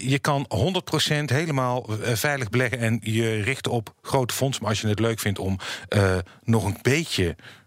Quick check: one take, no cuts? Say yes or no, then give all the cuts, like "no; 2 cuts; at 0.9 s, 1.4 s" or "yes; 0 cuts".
yes; 0 cuts